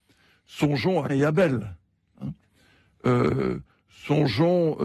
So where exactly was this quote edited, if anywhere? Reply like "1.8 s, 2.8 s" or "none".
1.1 s